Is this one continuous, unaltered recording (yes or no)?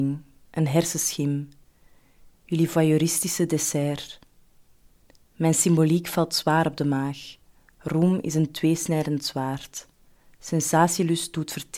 yes